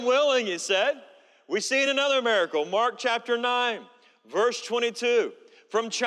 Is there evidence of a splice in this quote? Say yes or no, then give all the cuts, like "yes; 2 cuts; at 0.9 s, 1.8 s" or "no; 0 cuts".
no; 0 cuts